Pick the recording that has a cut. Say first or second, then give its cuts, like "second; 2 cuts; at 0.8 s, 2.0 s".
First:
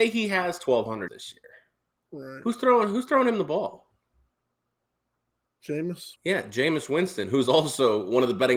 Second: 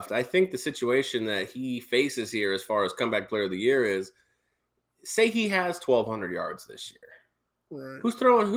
first; 2 cuts; at 1.1 s, 6.2 s